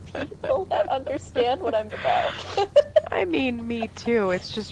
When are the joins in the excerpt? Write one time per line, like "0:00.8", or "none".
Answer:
0:01.9